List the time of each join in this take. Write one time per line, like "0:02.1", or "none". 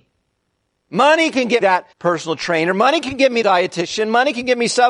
0:01.6
0:01.9
0:03.4